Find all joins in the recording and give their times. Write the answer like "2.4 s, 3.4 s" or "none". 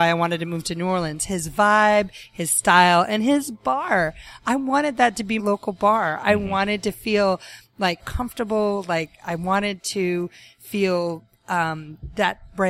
5.4 s, 8.0 s